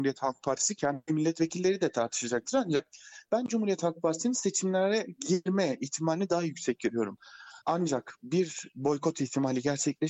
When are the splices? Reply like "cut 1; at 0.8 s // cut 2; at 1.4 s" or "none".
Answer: cut 1; at 7.6 s